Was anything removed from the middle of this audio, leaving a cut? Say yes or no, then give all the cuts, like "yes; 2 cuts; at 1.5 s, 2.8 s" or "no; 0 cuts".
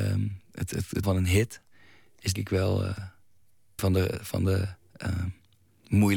yes; 3 cuts; at 1.0 s, 2.4 s, 3.8 s